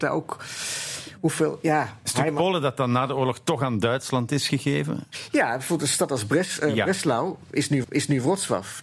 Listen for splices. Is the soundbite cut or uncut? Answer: cut